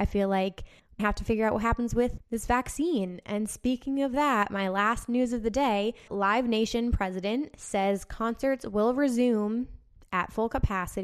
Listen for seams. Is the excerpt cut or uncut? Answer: cut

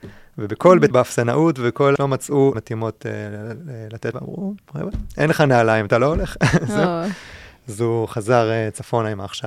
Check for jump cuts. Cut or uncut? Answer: cut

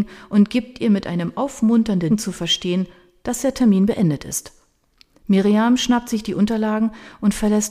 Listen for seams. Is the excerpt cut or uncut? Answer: cut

